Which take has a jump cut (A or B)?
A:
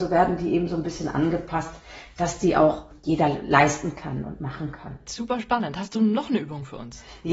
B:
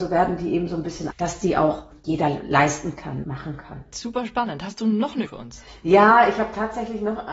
B